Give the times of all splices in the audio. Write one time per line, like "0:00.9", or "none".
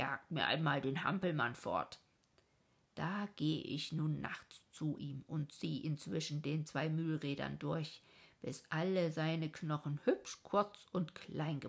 none